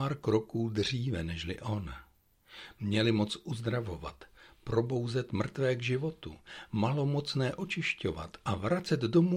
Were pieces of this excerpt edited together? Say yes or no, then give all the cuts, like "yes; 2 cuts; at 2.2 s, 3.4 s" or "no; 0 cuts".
no; 0 cuts